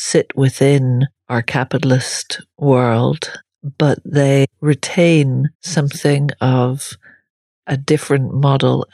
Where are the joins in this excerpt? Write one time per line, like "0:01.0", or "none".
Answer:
0:05.5